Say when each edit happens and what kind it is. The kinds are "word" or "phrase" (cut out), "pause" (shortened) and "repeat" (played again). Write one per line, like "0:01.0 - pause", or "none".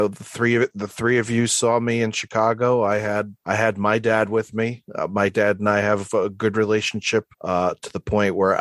0:03.4 - pause
0:07.3 - pause